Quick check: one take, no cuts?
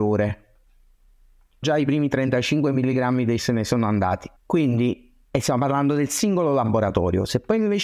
no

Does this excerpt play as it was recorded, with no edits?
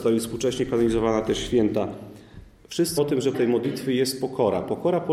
no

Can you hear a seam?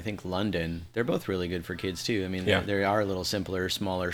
no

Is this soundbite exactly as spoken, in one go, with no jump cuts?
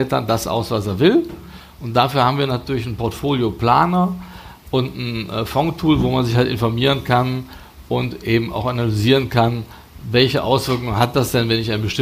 yes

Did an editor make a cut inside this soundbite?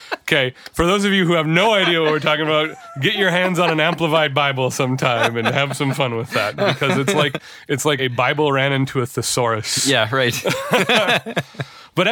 yes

